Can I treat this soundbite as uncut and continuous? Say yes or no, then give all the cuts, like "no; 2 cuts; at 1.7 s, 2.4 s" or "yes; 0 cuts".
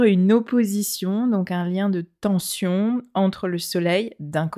yes; 0 cuts